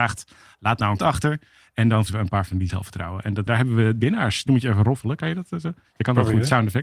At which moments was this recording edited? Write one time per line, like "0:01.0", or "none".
0:01.0
0:02.1
0:02.7
0:03.5
0:04.0
0:04.5